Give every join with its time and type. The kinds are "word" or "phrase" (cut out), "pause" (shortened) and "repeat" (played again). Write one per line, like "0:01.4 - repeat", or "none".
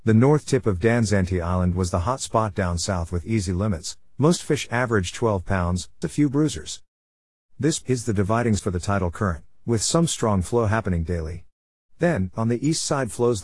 0:06.0 - word
0:07.8 - word
0:08.6 - word

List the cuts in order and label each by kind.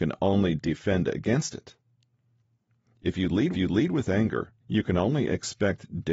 0:03.5 - repeat
0:04.6 - pause

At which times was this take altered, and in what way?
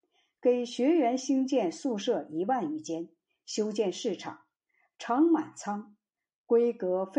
none

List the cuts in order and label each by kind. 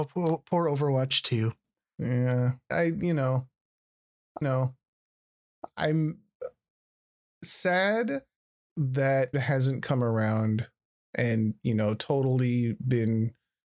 0:02.7 - word
0:04.4 - repeat
0:09.3 - word

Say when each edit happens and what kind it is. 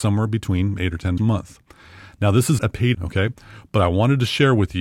0:01.2 - word
0:02.6 - word
0:02.9 - word

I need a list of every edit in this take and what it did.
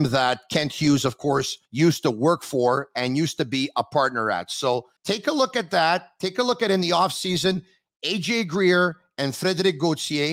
0:01.6 - pause
0:05.0 - pause

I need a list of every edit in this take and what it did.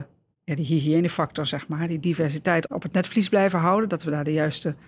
none

